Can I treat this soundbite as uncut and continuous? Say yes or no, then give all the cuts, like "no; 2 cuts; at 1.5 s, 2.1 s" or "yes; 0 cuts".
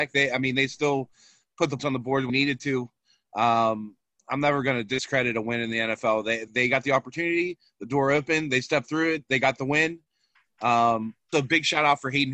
no; 4 cuts; at 1.8 s, 2.3 s, 6.5 s, 11.3 s